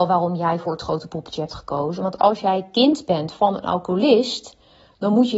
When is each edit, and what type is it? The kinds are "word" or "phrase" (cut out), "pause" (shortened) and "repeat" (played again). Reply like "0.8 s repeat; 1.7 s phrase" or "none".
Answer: none